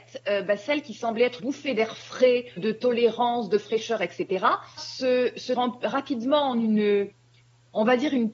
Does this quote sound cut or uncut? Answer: cut